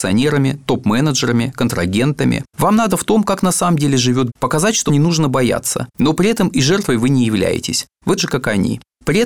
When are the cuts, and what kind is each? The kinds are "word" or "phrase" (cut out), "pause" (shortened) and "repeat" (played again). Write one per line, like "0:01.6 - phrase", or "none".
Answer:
0:02.5 - pause
0:02.9 - word
0:04.3 - word
0:04.9 - word
0:05.9 - pause
0:08.2 - word